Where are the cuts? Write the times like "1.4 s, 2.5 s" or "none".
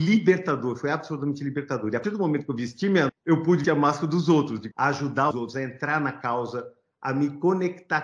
2.0 s, 3.1 s, 3.6 s, 4.7 s, 5.3 s